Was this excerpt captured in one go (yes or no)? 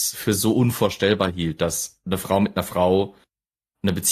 yes